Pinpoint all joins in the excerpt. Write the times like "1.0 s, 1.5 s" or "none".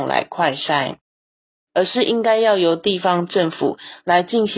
none